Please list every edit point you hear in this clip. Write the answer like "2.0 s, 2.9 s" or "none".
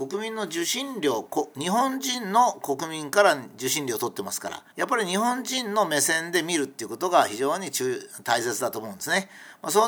4.7 s